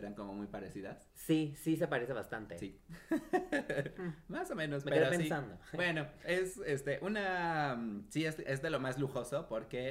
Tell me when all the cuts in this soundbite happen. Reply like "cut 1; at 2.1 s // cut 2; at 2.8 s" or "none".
cut 1; at 1.1 s

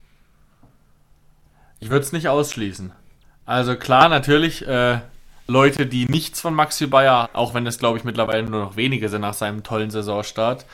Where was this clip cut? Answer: cut 1; at 3.2 s // cut 2; at 7.2 s

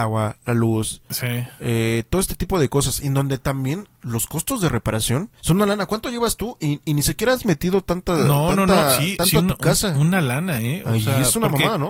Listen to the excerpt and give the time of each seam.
cut 1; at 5.3 s

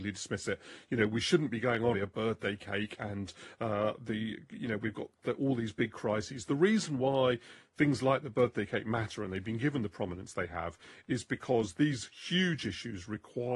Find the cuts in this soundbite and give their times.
cut 1; at 1.9 s

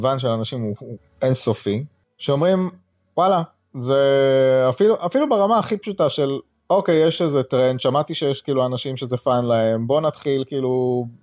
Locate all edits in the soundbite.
none

